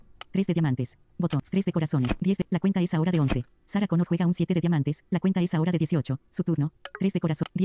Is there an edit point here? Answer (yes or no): yes